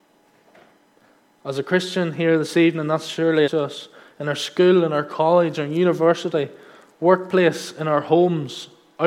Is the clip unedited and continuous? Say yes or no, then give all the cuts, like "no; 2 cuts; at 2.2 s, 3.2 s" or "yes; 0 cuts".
no; 1 cut; at 3.5 s